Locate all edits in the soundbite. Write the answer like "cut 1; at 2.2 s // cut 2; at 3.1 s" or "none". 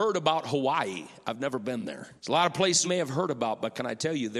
cut 1; at 2.2 s // cut 2; at 2.8 s